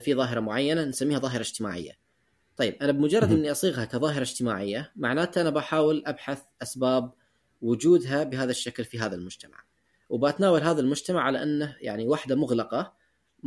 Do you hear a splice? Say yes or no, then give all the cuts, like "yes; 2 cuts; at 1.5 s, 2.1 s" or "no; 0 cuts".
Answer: no; 0 cuts